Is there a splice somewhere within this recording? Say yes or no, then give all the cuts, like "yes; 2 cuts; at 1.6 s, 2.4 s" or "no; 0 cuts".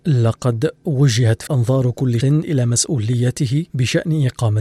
yes; 3 cuts; at 1.5 s, 2.2 s, 3.7 s